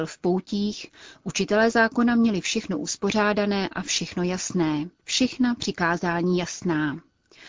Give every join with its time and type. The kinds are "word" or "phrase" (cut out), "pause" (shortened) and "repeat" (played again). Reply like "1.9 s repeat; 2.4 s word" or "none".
5.0 s pause